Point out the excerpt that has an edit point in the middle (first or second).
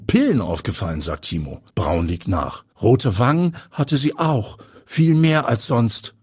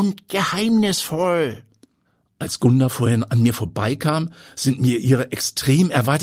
first